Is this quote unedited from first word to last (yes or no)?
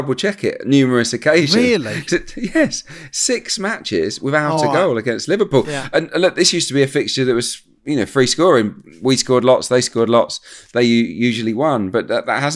yes